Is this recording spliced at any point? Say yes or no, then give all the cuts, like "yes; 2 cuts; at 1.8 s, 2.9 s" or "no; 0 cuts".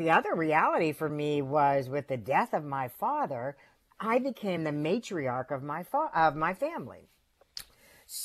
no; 0 cuts